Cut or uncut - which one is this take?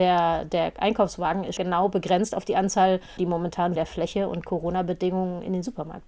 cut